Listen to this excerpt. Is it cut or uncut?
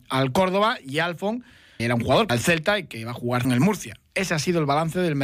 cut